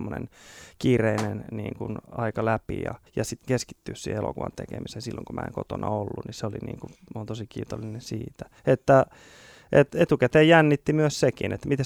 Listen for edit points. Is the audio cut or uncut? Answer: cut